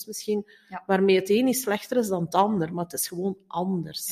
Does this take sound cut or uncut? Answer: uncut